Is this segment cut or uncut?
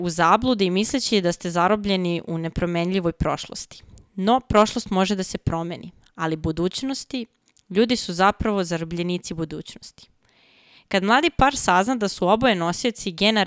uncut